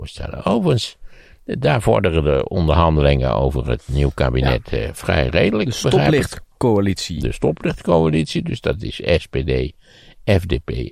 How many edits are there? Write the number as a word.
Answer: zero